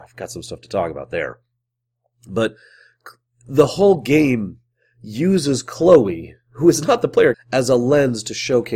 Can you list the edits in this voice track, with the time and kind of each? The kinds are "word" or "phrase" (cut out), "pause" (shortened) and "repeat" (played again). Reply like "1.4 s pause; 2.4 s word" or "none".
7.3 s word

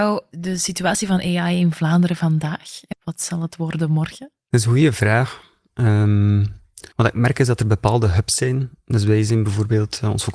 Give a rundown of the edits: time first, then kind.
2.9 s word; 6.9 s pause

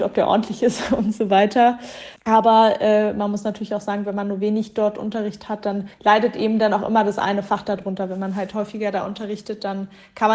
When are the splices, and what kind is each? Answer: 5.9 s pause

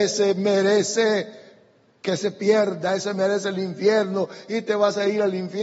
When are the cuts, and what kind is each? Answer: none

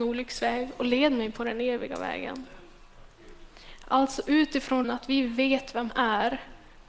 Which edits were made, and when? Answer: 4.8 s word; 5.9 s word

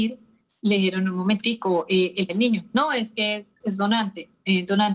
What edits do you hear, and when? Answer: 2.3 s word

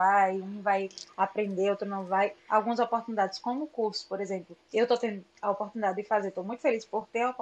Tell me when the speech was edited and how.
2.4 s pause; 4.6 s pause; 5.3 s pause

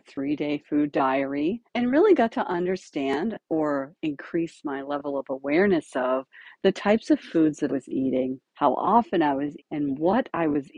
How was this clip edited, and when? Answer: 1.7 s pause; 7.7 s word; 8.5 s pause; 9.6 s word

